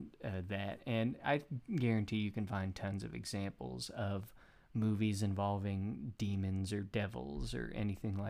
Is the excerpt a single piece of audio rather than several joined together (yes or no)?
yes